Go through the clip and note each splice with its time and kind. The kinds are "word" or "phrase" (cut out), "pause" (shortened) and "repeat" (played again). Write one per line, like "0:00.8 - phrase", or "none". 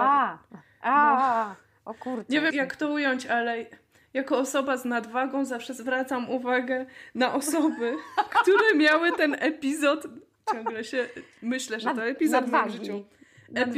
0:02.5 - word